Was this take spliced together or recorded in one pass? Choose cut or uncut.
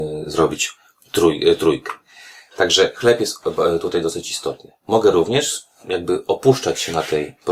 uncut